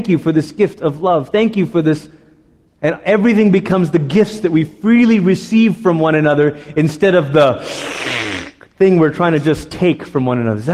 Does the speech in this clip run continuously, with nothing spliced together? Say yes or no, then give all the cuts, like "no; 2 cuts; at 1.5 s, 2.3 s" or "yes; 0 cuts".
yes; 0 cuts